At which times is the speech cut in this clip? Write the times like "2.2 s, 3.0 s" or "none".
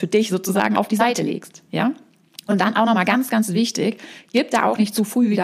none